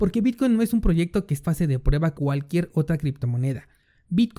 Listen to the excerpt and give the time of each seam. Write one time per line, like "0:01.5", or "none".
0:01.4
0:02.1